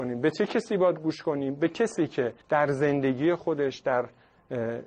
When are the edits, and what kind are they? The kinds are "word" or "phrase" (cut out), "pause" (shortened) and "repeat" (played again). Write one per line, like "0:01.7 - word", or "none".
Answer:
0:02.4 - pause